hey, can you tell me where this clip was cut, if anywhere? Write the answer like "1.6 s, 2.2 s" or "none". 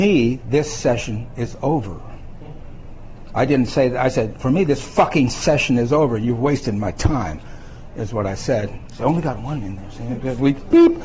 none